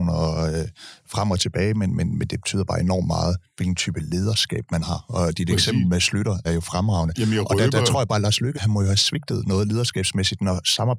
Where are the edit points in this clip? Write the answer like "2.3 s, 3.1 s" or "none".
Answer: 6.4 s, 8.5 s